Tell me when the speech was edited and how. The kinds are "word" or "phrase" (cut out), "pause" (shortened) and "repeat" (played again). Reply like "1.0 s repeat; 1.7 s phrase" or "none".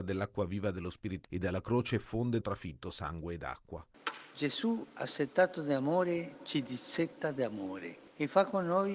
1.2 s word; 2.4 s phrase

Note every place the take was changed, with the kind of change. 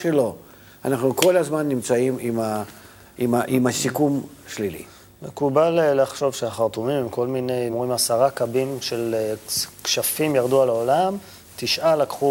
3.5 s word; 7.7 s word

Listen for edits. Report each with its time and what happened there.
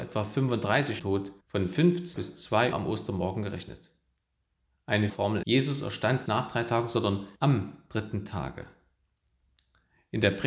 1.0 s word; 1.4 s pause; 2.2 s phrase; 2.7 s word; 5.1 s phrase; 5.4 s word; 6.3 s word; 7.4 s pause

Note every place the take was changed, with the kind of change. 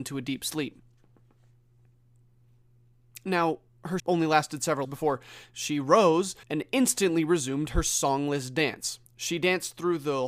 4.0 s word; 4.8 s word; 6.4 s pause; 9.1 s pause

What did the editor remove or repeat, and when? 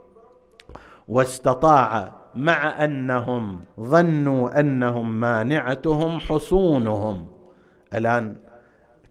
3.7 s pause

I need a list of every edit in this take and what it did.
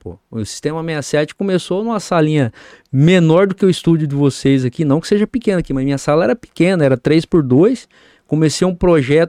none

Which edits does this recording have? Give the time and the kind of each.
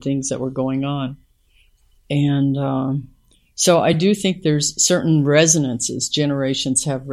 none

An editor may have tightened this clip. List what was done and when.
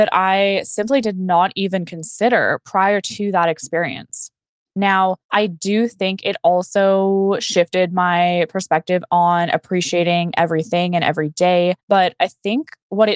5.2 s pause; 11.8 s pause

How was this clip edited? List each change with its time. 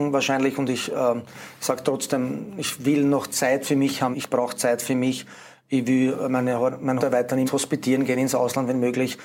4.1 s word; 7.0 s word; 7.5 s word

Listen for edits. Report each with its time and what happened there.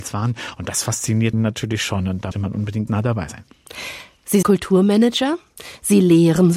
1.3 s word; 2.3 s word; 2.9 s word; 4.4 s word

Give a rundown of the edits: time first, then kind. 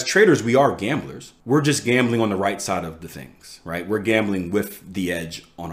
1.4 s pause

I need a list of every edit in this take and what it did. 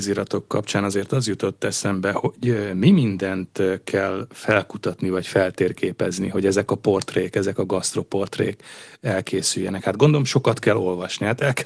none

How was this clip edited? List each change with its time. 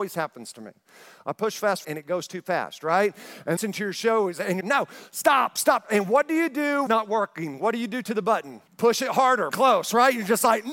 1.8 s word; 3.6 s phrase; 4.6 s word; 6.9 s phrase; 8.7 s pause; 9.5 s word

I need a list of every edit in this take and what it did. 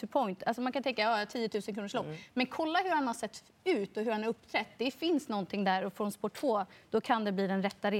none

